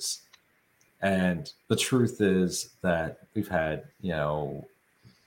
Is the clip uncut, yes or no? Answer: no